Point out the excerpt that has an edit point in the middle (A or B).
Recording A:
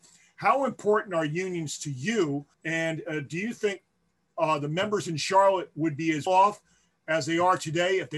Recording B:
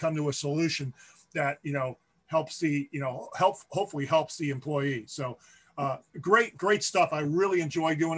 A